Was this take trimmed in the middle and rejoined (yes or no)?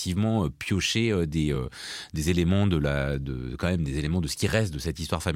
no